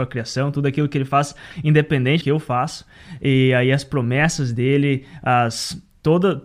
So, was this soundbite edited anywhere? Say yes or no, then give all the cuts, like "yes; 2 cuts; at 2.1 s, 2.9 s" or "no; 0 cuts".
yes; 1 cut; at 2.2 s